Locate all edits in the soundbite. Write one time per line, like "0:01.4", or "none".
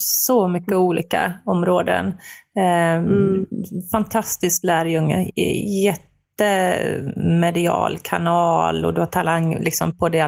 none